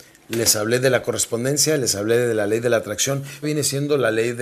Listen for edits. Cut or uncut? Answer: cut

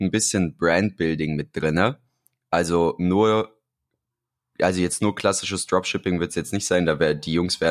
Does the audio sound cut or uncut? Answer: uncut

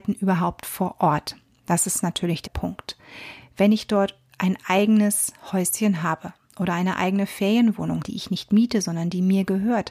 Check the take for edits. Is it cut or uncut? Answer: cut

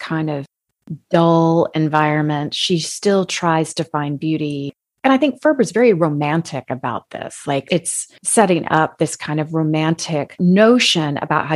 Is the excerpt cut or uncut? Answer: uncut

